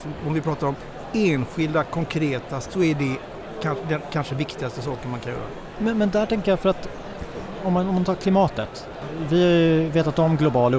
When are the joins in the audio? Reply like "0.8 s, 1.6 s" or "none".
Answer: 2.6 s